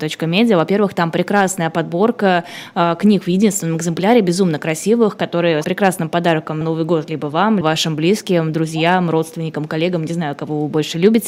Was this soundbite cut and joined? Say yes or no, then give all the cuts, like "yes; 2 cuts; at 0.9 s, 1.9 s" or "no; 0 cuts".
yes; 3 cuts; at 5.6 s, 6.6 s, 7.6 s